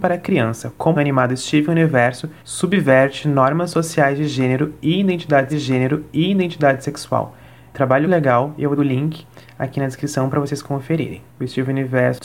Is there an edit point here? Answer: yes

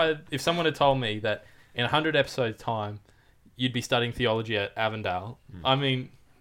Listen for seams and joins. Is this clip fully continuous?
yes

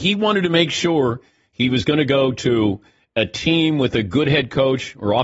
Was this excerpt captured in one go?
yes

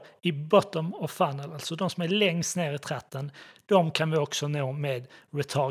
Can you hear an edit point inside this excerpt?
no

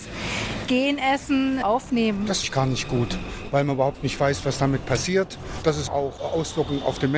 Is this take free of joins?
no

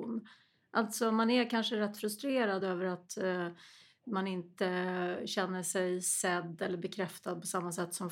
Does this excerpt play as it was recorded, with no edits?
yes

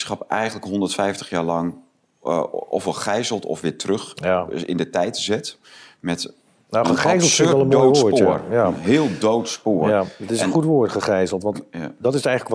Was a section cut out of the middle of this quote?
no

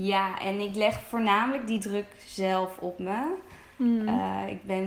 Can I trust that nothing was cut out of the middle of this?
yes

